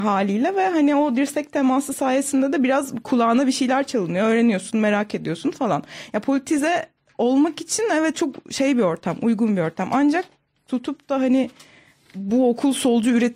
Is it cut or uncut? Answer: uncut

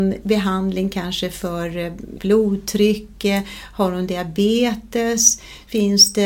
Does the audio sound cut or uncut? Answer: cut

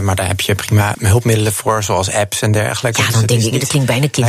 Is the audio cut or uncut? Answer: cut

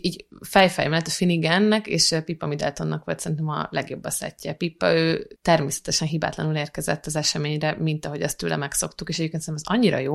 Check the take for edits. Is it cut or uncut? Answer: cut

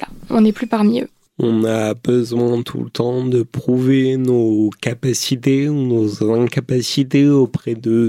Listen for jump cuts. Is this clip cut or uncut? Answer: uncut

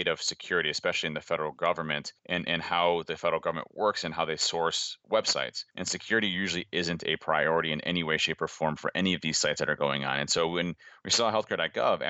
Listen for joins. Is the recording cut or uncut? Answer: cut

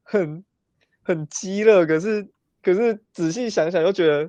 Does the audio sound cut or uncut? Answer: cut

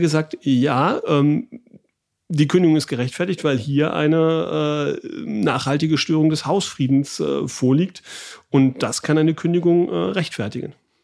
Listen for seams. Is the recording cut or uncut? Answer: uncut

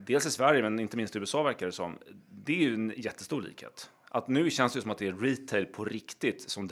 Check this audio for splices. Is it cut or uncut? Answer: uncut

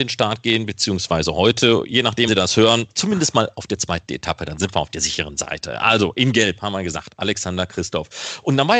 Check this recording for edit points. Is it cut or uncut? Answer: cut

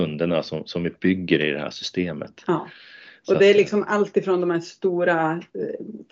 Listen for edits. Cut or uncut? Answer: uncut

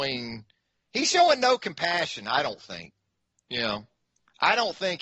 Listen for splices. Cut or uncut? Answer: uncut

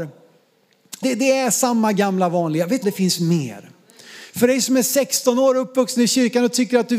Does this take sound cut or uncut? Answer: cut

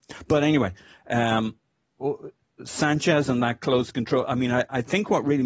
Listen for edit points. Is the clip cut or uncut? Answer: uncut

